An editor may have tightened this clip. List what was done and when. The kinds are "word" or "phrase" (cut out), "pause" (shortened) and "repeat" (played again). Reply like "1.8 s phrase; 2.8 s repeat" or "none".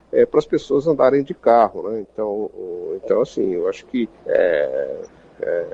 4.2 s pause